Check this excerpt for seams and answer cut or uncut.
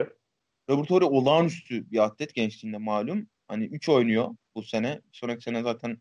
uncut